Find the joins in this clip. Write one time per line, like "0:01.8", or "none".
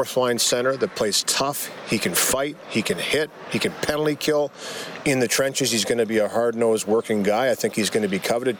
none